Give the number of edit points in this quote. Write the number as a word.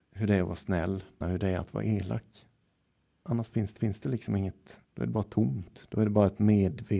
three